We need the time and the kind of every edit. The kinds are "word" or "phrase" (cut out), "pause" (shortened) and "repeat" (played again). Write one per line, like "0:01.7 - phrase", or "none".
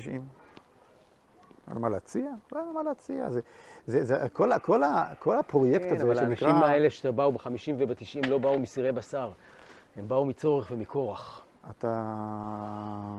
none